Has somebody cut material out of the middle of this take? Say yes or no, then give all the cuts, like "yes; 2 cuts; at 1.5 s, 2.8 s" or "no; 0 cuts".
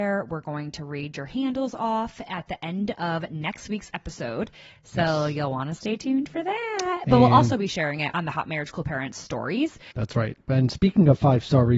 no; 0 cuts